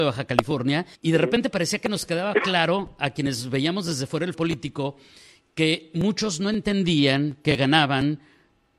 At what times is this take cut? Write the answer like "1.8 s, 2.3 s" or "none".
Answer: 0.9 s, 4.3 s